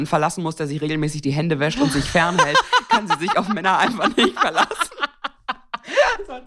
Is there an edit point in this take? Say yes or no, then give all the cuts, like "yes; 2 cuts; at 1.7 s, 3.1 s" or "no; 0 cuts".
no; 0 cuts